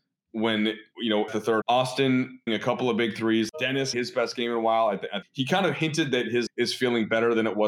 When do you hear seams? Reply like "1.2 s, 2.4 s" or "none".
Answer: 1.3 s, 1.6 s, 2.5 s, 3.9 s, 5.2 s, 6.5 s